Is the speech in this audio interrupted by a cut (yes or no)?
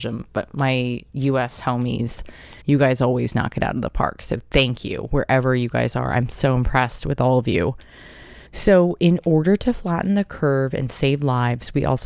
yes